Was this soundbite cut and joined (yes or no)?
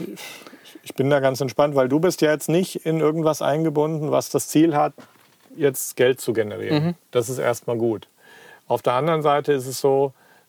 no